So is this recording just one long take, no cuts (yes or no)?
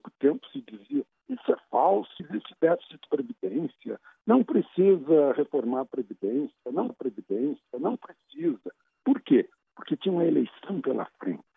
no